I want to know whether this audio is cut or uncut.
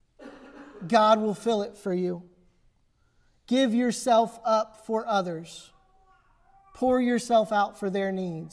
uncut